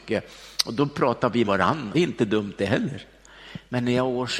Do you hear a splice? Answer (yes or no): yes